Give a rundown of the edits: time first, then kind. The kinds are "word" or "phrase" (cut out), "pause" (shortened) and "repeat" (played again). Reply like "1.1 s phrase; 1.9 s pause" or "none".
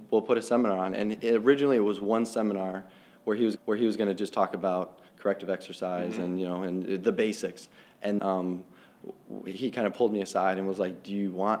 3.6 s repeat; 5.1 s pause; 8.2 s word

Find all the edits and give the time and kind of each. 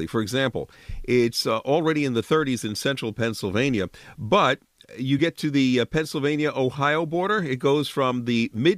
none

